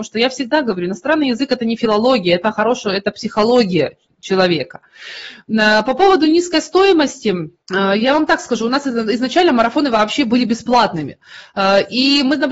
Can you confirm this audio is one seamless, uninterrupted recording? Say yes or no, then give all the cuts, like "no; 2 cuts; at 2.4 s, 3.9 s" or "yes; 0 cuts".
no; 1 cut; at 7.6 s